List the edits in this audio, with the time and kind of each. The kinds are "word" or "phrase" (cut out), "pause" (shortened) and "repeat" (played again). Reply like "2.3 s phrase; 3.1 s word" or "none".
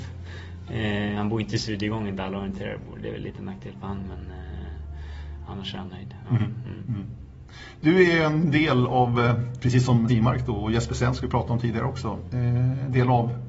10.1 s word